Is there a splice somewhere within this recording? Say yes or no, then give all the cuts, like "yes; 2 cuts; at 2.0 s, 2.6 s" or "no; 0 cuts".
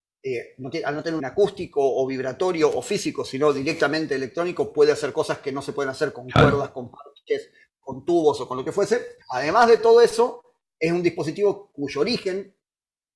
yes; 2 cuts; at 1.2 s, 9.2 s